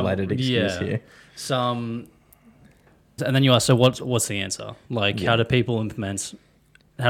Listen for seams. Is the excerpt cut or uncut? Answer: cut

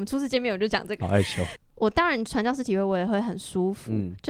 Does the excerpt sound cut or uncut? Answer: cut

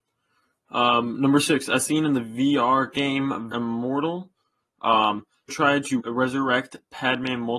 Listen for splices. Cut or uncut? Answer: cut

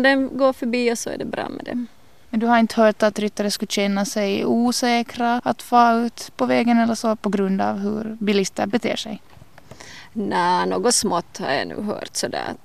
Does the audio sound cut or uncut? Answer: uncut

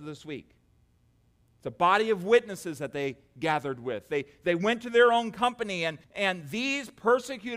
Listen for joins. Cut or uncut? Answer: cut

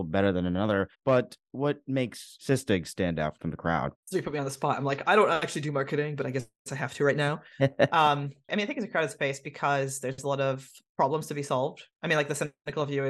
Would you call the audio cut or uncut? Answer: cut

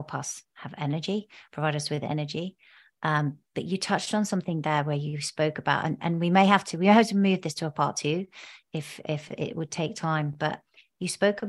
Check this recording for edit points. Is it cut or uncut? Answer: uncut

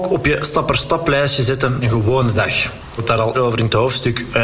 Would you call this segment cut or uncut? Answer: cut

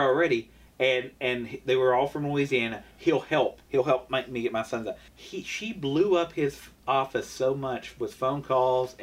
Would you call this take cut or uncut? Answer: cut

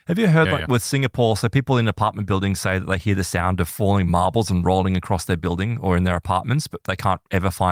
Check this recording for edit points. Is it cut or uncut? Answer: uncut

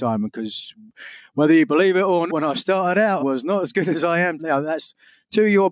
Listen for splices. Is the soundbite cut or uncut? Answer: cut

